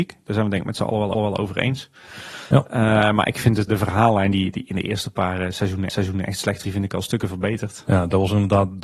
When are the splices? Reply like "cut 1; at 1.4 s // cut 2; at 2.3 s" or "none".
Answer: cut 1; at 1.1 s // cut 2; at 3.7 s // cut 3; at 5.9 s // cut 4; at 6.6 s